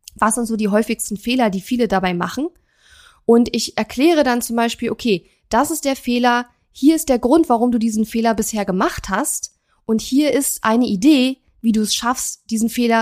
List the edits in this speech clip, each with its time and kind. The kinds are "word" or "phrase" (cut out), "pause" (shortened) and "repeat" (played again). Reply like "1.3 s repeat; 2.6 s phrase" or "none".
none

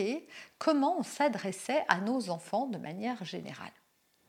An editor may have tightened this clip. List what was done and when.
none

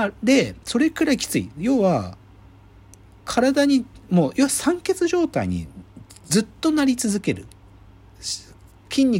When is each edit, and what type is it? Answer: none

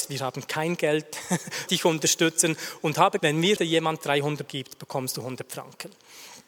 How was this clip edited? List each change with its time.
1.7 s phrase; 3.2 s word; 3.6 s word; 4.5 s word

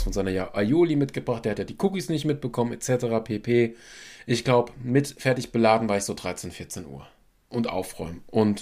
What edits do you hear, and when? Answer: none

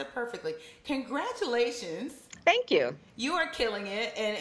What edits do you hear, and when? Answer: none

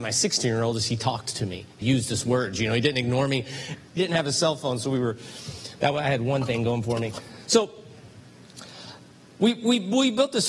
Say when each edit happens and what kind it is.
1.8 s word; 4.0 s word

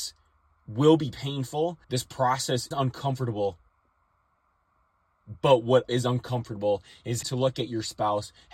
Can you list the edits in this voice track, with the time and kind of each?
1.8 s pause; 2.7 s word; 5.9 s word; 7.2 s word

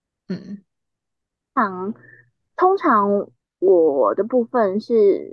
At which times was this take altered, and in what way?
3.3 s pause

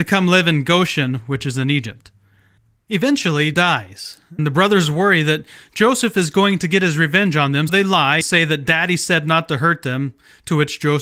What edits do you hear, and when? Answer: 3.5 s word; 4.4 s word; 7.7 s word; 8.2 s word

